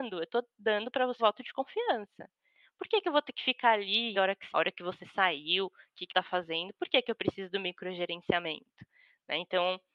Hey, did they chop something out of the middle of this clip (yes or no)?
yes